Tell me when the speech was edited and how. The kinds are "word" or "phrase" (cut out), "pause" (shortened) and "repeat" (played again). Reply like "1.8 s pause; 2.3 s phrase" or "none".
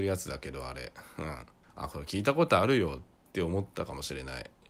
1.6 s pause